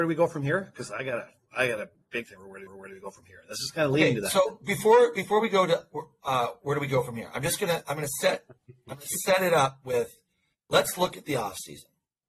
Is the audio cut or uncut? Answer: cut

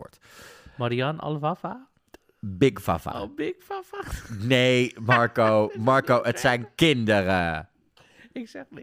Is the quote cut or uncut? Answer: uncut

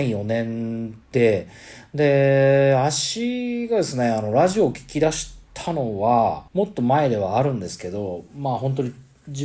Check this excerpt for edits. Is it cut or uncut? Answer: cut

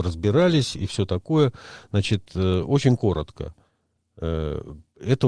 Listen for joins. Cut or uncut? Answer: uncut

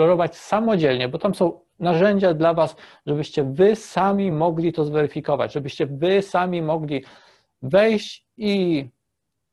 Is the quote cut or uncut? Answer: uncut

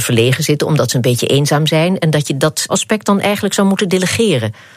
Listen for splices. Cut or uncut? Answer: cut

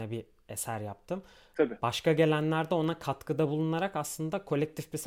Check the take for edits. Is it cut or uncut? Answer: uncut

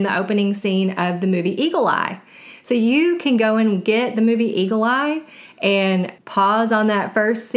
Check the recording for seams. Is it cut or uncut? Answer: cut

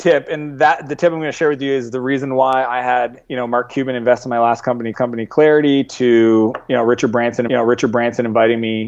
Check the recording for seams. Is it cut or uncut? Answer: cut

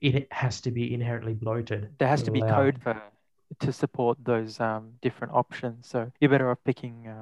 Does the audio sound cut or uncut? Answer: cut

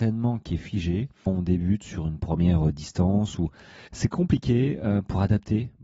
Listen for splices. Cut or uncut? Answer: cut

